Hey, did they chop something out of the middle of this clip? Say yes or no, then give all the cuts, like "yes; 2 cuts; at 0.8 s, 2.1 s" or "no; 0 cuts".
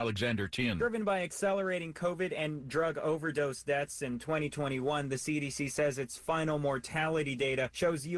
no; 0 cuts